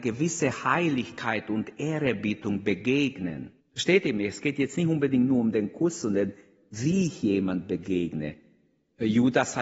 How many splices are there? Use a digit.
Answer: 1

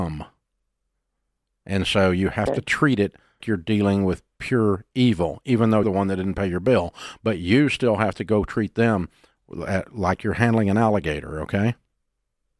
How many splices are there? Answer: 2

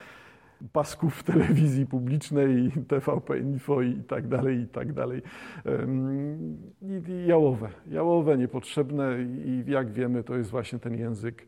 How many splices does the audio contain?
0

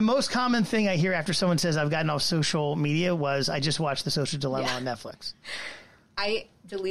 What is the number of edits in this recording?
0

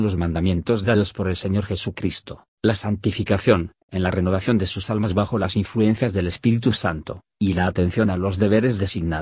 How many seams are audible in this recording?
1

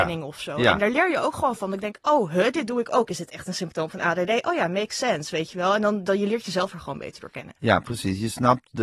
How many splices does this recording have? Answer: 0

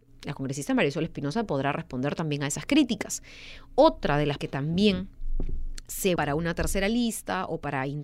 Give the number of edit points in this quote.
2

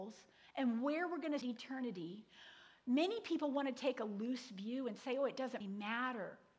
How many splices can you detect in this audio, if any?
2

